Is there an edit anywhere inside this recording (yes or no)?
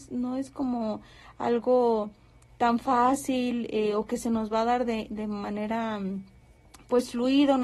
no